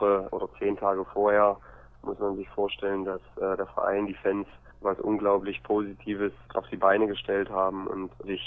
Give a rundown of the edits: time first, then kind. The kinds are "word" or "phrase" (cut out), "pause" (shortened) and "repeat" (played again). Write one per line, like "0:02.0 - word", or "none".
none